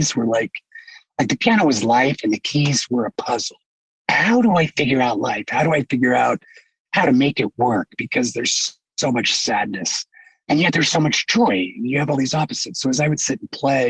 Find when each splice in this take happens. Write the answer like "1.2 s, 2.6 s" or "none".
none